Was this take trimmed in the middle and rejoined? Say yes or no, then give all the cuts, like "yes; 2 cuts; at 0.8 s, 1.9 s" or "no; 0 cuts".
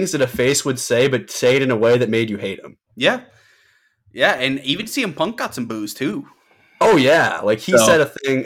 yes; 1 cut; at 2.8 s